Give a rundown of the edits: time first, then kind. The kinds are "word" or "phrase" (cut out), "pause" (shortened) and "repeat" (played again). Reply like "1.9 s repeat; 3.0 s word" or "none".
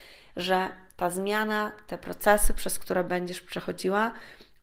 none